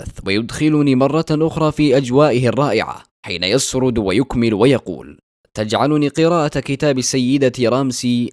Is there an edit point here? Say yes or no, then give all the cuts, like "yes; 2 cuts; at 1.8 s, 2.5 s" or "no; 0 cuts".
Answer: no; 0 cuts